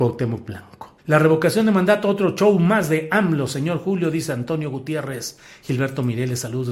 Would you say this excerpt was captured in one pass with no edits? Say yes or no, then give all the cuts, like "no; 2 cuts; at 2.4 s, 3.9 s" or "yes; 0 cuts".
no; 1 cut; at 1.0 s